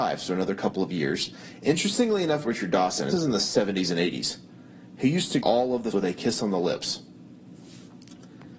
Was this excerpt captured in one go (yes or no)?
no